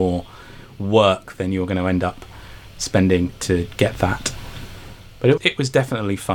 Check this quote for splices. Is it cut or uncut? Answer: cut